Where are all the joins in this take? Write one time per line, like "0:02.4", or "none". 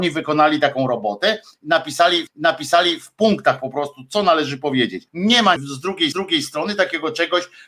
0:02.3
0:05.1
0:05.6
0:06.1